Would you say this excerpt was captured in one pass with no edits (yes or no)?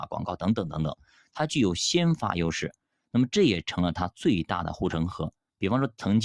yes